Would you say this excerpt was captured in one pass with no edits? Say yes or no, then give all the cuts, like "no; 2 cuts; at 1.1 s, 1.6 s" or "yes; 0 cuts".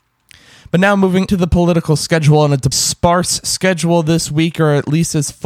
no; 2 cuts; at 1.3 s, 2.7 s